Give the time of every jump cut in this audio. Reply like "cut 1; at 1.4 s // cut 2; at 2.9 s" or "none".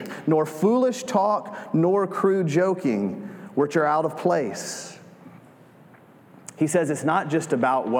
none